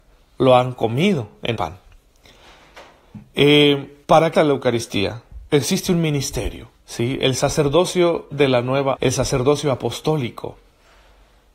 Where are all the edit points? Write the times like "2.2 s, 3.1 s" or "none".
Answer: 1.5 s, 4.0 s, 4.3 s, 5.5 s, 6.8 s, 8.3 s, 9.0 s

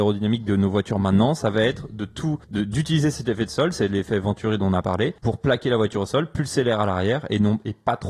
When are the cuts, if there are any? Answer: 2.4 s, 5.2 s

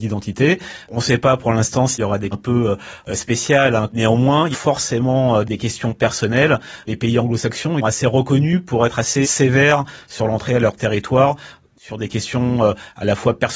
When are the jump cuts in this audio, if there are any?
2.3 s, 4.5 s, 7.8 s, 9.2 s

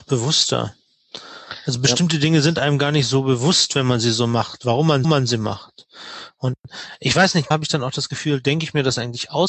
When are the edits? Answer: 5.0 s, 7.5 s

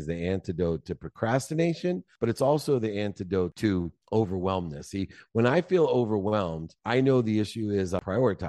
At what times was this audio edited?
none

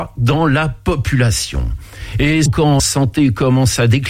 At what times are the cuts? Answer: 2.5 s, 2.8 s

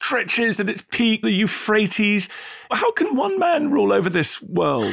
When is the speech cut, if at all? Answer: 1.2 s

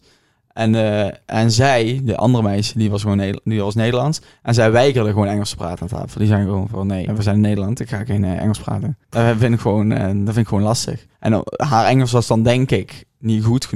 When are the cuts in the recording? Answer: 7.1 s, 9.0 s, 11.1 s

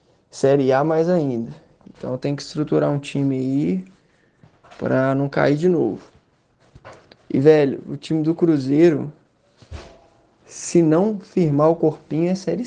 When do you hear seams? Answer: none

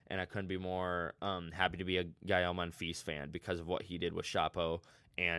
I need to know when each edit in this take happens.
none

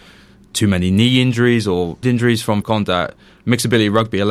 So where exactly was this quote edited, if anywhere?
2.0 s, 2.6 s

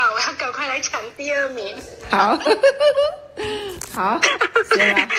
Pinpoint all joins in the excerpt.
none

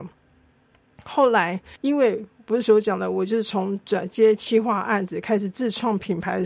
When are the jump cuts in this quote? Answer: 1.8 s

